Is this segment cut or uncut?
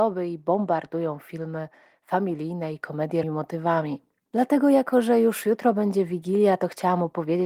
cut